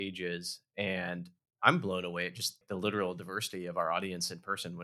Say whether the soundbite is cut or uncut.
uncut